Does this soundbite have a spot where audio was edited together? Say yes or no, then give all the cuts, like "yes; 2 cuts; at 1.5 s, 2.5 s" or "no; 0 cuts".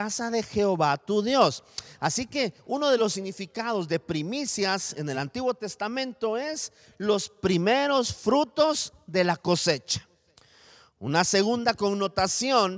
no; 0 cuts